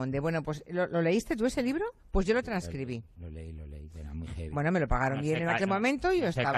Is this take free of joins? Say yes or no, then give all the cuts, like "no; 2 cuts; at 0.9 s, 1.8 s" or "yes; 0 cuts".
no; 1 cut; at 2.0 s